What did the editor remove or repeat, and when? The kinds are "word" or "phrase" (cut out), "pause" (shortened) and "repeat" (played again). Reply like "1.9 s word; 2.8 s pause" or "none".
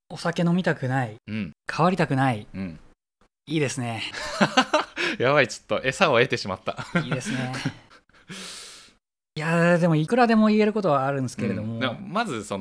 none